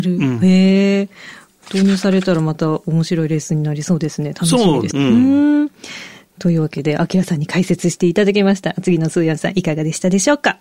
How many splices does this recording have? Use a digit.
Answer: 1